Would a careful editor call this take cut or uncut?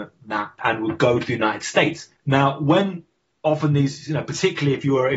uncut